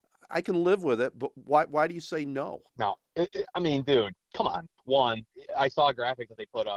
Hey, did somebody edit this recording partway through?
yes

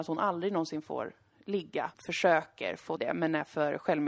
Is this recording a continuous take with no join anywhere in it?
no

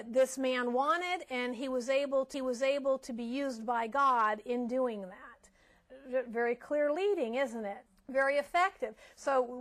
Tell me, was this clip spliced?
yes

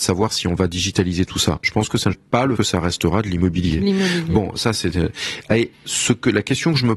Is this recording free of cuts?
no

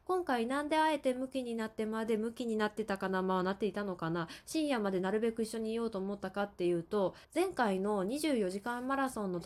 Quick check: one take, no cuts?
no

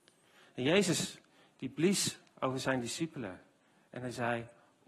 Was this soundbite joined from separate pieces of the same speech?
no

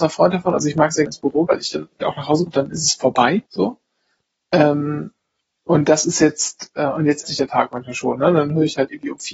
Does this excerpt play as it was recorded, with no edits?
no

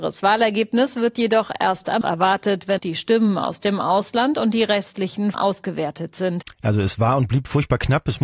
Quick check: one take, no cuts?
no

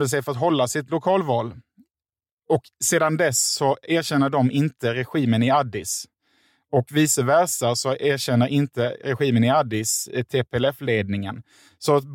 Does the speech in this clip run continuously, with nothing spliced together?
yes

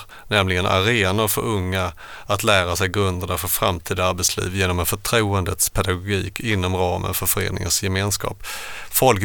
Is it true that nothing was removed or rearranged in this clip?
yes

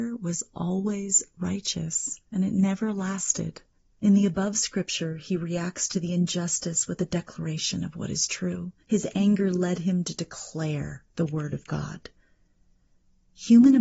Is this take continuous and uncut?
no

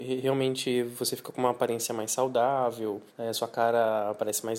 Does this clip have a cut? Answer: yes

